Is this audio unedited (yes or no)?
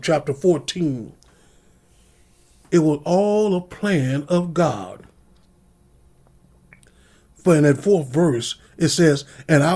yes